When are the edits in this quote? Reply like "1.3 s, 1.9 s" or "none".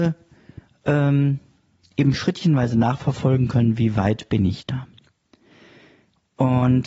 none